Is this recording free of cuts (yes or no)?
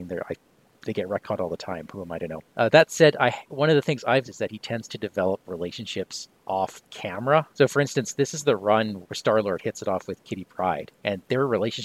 no